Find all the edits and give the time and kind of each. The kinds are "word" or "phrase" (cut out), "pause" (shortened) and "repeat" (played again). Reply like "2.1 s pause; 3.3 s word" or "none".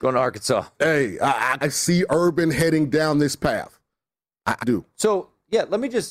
1.6 s word; 4.6 s word